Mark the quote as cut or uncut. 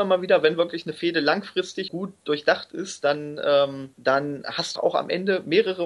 cut